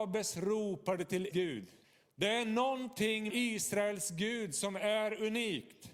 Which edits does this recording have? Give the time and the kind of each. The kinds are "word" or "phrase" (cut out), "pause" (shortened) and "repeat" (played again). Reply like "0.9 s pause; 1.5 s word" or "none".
1.3 s word; 1.8 s pause; 3.3 s word

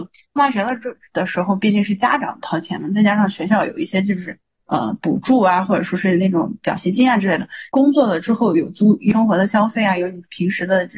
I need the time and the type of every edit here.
none

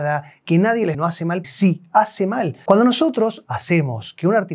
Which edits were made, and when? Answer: 0.9 s phrase; 1.4 s word

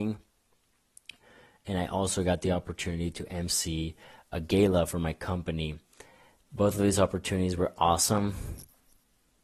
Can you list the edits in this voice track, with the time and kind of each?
none

